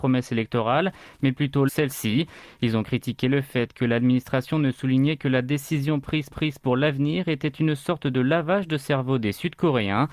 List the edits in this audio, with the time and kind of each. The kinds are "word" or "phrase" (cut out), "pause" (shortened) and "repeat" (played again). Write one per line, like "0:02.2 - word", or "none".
0:01.7 - phrase
0:06.3 - repeat